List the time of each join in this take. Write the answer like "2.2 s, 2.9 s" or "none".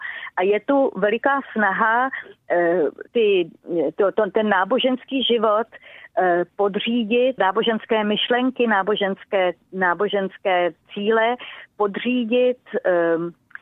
3.1 s, 7.4 s